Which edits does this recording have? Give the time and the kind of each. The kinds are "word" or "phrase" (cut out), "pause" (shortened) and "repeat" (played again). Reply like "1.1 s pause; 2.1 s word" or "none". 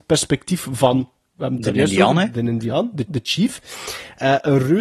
1.2 s pause; 3.1 s repeat